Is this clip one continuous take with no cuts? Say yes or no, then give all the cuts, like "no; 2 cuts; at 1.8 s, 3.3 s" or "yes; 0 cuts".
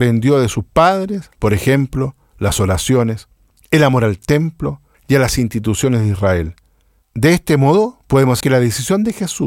no; 2 cuts; at 1.3 s, 8.4 s